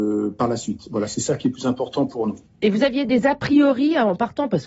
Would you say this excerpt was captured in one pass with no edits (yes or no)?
yes